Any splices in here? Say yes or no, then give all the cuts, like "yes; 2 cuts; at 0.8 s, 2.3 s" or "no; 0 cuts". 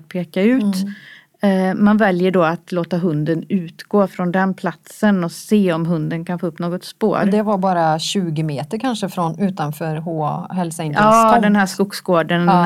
no; 0 cuts